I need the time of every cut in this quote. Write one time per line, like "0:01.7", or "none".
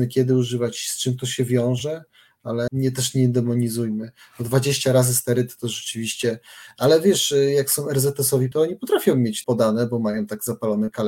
0:02.7
0:08.5
0:09.4